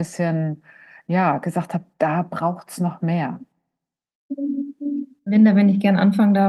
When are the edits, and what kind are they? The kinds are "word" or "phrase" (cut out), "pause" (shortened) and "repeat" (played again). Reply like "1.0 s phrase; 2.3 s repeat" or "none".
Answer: none